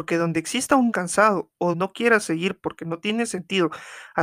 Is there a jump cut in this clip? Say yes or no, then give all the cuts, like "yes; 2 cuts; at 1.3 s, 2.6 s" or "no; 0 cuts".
yes; 2 cuts; at 0.9 s, 1.7 s